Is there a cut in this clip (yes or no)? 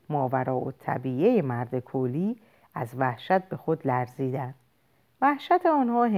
no